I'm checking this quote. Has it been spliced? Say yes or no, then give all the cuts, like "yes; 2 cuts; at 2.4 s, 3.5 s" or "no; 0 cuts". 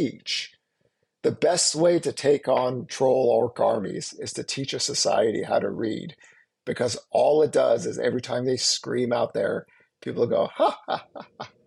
no; 0 cuts